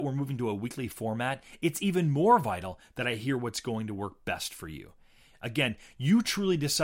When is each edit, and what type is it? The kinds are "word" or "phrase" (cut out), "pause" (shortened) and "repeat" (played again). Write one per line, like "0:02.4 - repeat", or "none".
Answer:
none

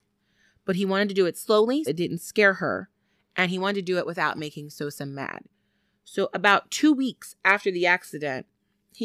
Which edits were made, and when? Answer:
0:01.9 - word

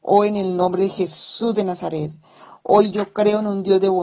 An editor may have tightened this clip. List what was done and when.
none

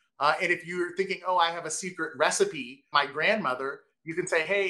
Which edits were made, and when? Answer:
0:02.9 - word

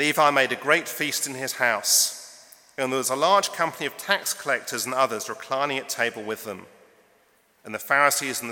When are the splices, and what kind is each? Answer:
none

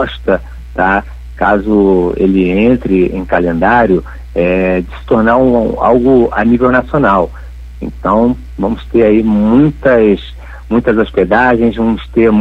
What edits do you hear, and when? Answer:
none

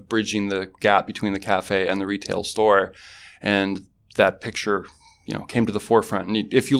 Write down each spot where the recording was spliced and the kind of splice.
none

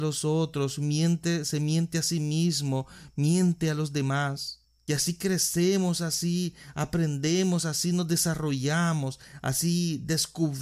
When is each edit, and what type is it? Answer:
none

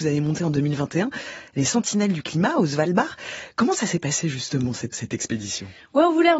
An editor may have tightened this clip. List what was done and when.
0:04.9 - word

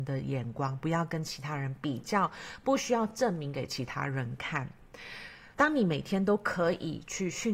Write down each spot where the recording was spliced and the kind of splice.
0:05.5 - pause

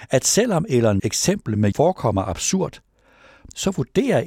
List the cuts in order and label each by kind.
0:01.0 - word
0:01.7 - word

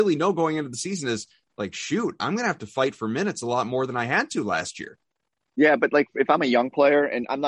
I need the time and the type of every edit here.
none

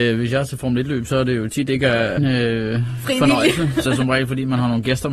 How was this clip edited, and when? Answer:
0:02.2 - phrase
0:03.9 - word

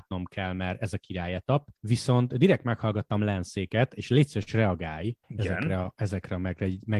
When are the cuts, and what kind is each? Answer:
0:01.8 - pause
0:05.2 - pause

